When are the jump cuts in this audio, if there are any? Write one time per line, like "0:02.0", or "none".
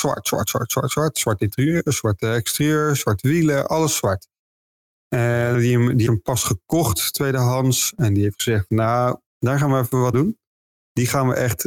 0:05.5
0:06.1
0:09.3
0:10.1